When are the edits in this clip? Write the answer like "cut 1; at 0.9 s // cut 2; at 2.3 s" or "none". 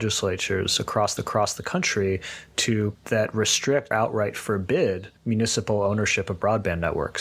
cut 1; at 1.2 s // cut 2; at 2.9 s // cut 3; at 3.9 s // cut 4; at 5.2 s